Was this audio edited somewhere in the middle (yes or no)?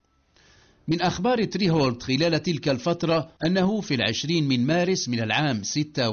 yes